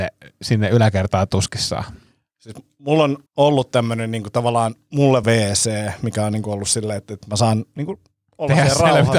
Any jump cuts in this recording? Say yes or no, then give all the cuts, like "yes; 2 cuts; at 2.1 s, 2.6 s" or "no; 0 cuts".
yes; 2 cuts; at 3.3 s, 5.2 s